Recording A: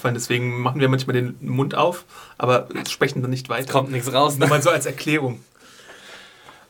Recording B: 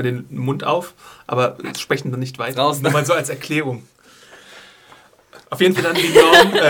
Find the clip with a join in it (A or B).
B